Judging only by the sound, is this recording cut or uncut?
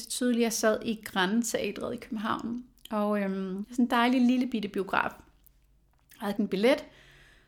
cut